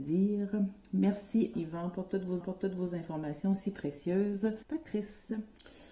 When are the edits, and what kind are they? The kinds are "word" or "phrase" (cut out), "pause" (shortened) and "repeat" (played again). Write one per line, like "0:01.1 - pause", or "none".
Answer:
0:01.5 - word
0:02.4 - repeat
0:04.6 - pause